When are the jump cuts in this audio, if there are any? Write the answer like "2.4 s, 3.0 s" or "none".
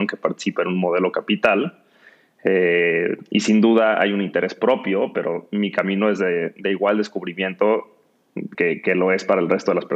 8.5 s